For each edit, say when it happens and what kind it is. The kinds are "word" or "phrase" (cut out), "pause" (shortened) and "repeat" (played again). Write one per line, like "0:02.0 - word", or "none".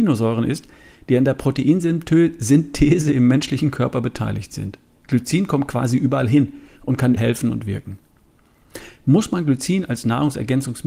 0:07.2 - word